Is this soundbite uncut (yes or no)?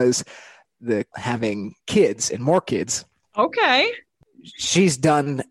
no